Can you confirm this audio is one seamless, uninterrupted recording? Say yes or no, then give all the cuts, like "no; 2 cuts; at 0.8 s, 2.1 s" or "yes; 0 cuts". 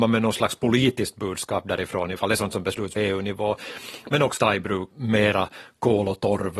no; 4 cuts; at 2.2 s, 3.0 s, 4.4 s, 4.9 s